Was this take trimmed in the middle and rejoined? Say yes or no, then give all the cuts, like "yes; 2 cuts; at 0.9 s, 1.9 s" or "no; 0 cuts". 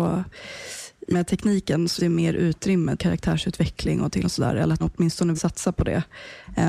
yes; 6 cuts; at 1.1 s, 2.0 s, 3.0 s, 4.2 s, 4.8 s, 5.3 s